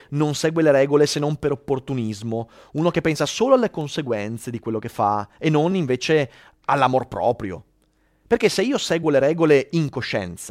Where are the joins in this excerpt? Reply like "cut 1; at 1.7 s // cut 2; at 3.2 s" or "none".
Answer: none